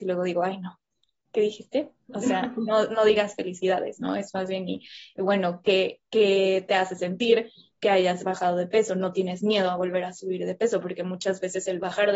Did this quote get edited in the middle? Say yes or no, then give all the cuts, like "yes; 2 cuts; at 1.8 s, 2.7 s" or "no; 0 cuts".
no; 0 cuts